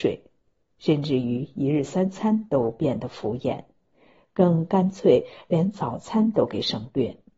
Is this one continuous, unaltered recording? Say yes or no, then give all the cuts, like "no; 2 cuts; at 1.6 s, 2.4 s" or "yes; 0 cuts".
yes; 0 cuts